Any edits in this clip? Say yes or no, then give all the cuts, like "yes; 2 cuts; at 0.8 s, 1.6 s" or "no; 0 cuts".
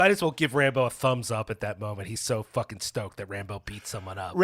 no; 0 cuts